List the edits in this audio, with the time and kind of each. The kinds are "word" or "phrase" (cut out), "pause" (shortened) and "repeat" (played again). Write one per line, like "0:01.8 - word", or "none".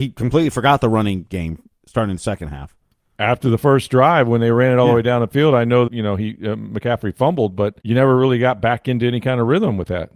0:01.7 - pause
0:05.9 - phrase
0:07.8 - pause